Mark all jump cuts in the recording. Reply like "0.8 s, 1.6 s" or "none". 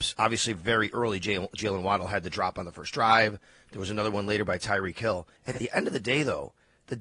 5.4 s